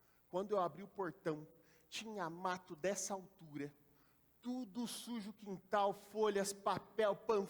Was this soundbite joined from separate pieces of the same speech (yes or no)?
no